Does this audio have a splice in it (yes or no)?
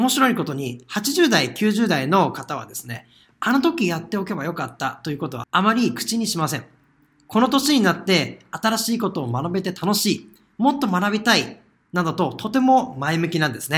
no